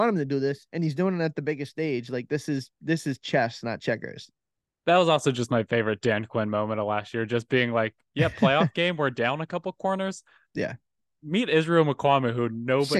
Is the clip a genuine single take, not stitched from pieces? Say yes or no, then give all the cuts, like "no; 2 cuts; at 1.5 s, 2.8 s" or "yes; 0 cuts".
yes; 0 cuts